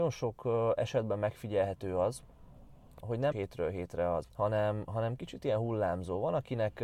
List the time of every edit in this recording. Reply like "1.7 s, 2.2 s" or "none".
3.0 s, 3.3 s, 4.2 s

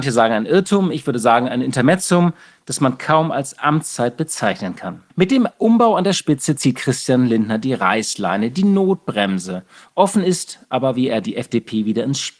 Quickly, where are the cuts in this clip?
5.1 s

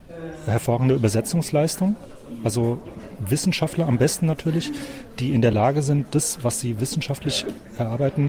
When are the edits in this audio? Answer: none

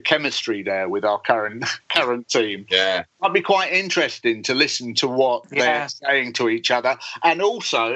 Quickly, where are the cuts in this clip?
1.8 s

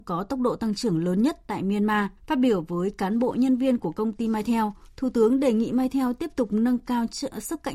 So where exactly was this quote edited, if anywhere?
2.2 s

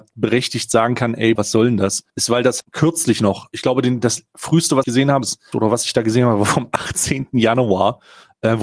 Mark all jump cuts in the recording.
1.4 s, 2.1 s, 2.6 s, 4.8 s, 5.2 s, 5.5 s

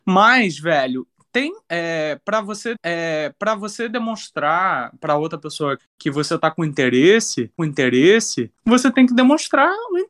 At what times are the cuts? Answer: 2.7 s, 5.8 s, 7.6 s

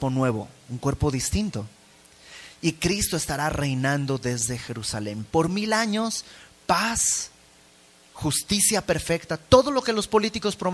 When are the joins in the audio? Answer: none

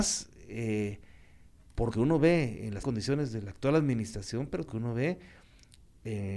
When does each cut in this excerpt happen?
1.9 s, 2.8 s, 4.7 s

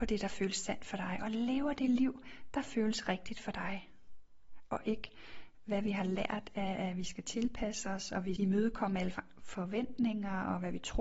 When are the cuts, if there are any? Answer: 8.4 s

